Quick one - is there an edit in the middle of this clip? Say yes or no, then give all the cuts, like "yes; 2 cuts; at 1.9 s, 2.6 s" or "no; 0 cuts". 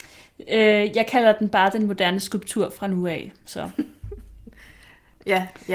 no; 0 cuts